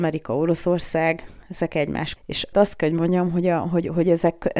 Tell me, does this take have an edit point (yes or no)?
yes